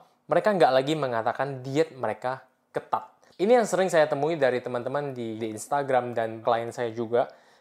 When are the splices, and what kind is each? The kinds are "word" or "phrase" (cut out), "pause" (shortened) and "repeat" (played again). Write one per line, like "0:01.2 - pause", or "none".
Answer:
0:05.4 - word
0:06.4 - word